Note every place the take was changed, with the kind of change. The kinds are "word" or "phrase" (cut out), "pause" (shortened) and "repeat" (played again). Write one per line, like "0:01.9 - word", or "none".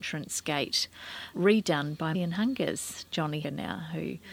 0:01.3 - word
0:02.1 - word
0:03.4 - word